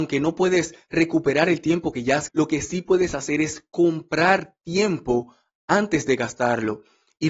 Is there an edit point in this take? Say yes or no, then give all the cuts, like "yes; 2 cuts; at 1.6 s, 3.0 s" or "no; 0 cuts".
yes; 1 cut; at 2.3 s